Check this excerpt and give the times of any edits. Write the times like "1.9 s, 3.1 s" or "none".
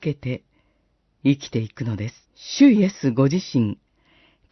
2.2 s